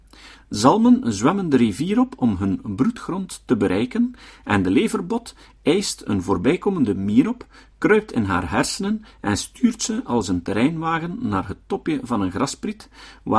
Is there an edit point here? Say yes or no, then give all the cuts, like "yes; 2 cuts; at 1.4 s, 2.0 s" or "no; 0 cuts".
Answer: no; 0 cuts